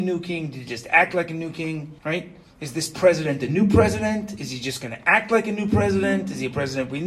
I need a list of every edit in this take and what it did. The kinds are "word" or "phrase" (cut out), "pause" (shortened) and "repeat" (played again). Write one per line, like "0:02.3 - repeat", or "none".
0:02.0 - pause